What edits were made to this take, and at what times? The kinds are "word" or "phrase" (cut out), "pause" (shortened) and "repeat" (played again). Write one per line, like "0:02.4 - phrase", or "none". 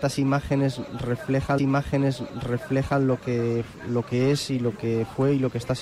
0:01.6 - repeat